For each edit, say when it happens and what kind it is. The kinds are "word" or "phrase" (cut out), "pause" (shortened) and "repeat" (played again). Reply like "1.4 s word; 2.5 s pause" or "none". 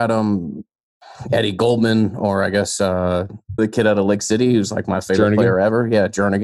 3.6 s word